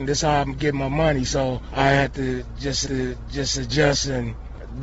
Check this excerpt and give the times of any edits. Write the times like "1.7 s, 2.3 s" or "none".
2.9 s